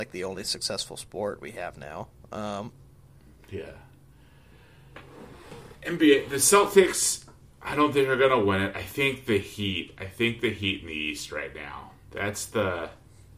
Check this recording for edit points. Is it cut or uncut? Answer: uncut